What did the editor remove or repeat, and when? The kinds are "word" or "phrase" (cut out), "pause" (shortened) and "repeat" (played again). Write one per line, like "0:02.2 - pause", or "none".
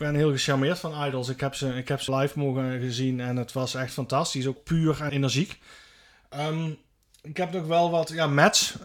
0:02.1 - word
0:04.6 - word
0:05.1 - word